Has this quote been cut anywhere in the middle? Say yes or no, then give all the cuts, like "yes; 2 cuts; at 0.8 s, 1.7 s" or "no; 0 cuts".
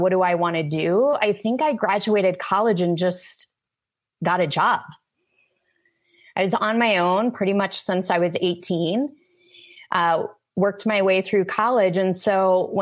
no; 0 cuts